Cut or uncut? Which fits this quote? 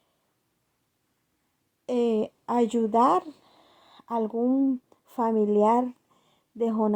uncut